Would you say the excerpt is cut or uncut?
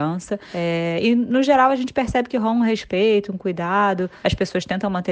uncut